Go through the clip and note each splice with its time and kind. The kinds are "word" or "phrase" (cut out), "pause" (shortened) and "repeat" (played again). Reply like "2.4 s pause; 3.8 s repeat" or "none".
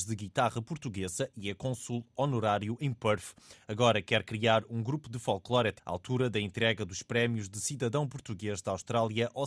5.8 s word